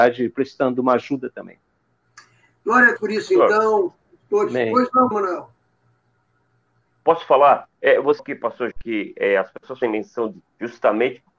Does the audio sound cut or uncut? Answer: cut